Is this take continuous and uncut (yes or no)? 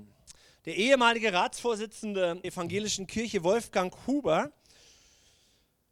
no